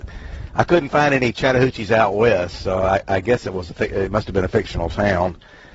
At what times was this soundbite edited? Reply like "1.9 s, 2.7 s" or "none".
none